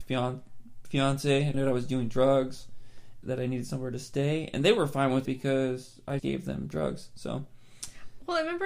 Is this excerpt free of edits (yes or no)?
no